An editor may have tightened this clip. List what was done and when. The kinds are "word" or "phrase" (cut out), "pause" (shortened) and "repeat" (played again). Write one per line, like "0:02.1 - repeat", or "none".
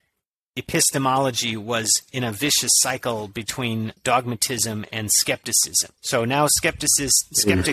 0:04.0 - pause
0:06.0 - pause

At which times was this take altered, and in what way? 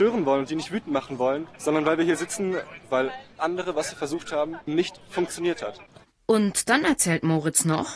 0:03.4 - word
0:04.7 - word

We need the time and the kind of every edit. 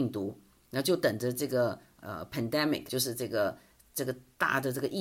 0:02.9 - word

